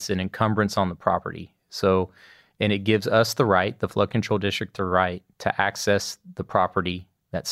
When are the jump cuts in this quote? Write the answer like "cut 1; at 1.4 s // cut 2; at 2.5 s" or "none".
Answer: none